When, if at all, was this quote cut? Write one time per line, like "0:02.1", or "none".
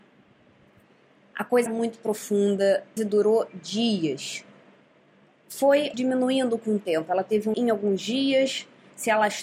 0:01.7
0:03.0
0:05.9
0:07.5

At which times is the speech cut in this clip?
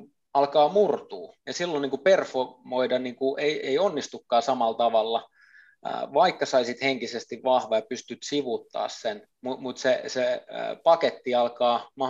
0:01.4
0:03.6
0:09.3

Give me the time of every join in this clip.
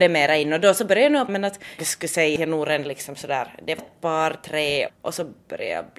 0:01.3
0:01.8
0:02.4
0:03.8
0:04.9

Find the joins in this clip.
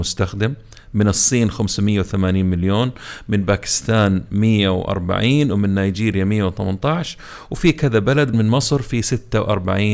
0:08.3

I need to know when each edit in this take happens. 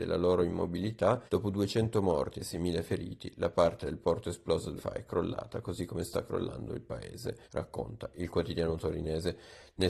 0:01.3
0:04.8
0:07.4

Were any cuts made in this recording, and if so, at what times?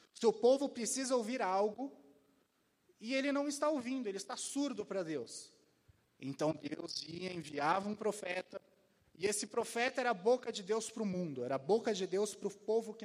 none

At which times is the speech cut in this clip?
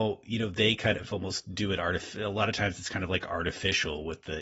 none

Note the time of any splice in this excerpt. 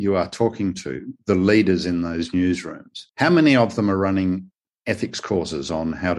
0:03.1
0:04.7

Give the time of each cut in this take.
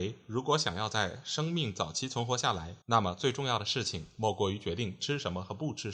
0:02.8

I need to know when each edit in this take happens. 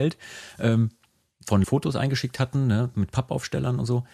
0:01.6

